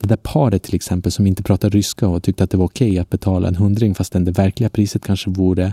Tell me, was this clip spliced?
no; 0 cuts

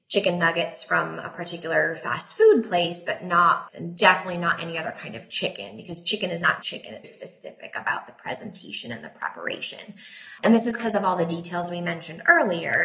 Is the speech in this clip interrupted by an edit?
yes; 3 cuts; at 3.7 s, 6.6 s, 7.0 s

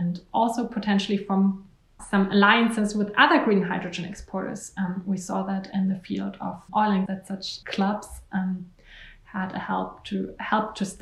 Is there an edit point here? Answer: yes; 4 cuts; at 2.0 s, 6.7 s, 7.1 s, 7.6 s

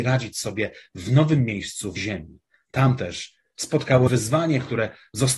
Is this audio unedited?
no; 2 cuts; at 2.0 s, 4.1 s

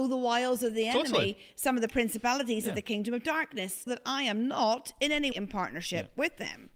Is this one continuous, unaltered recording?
no; 2 cuts; at 3.9 s, 5.3 s

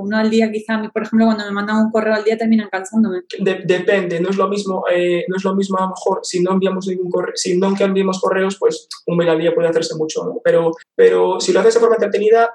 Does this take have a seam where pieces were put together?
yes; 2 cuts; at 3.3 s, 10.8 s

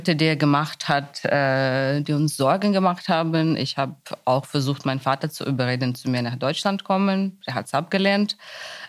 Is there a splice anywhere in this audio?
no; 0 cuts

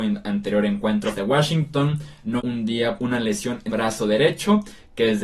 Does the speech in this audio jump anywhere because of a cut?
yes; 4 cuts; at 1.1 s, 2.4 s, 3.0 s, 3.7 s

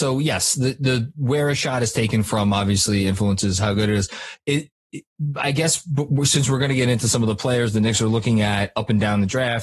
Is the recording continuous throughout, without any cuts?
yes; 0 cuts

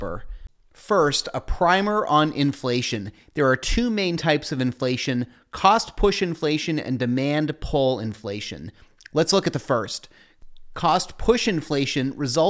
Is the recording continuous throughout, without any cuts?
yes; 0 cuts

